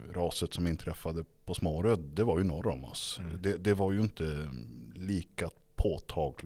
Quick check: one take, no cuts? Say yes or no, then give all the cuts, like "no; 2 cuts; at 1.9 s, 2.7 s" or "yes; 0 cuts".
yes; 0 cuts